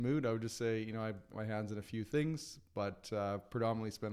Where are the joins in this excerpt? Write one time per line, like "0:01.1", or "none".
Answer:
0:01.3